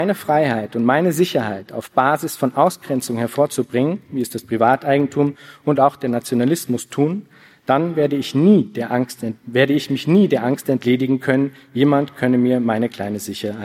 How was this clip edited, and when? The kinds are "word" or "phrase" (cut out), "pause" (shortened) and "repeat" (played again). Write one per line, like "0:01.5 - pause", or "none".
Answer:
0:09.4 - pause